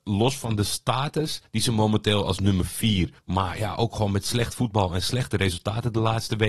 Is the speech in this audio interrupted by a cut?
yes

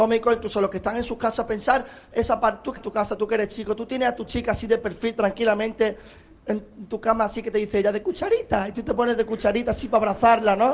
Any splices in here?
yes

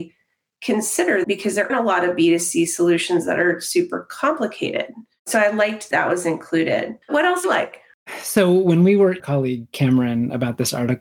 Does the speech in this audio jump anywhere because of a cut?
yes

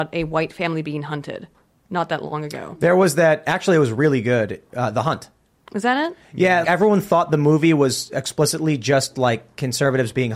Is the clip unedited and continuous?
no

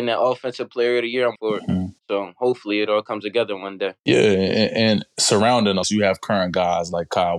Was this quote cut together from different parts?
yes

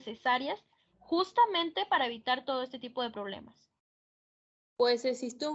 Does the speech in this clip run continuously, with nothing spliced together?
yes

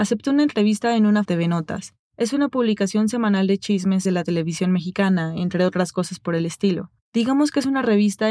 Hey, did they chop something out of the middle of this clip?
yes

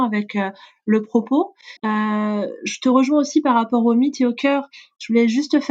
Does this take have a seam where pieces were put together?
yes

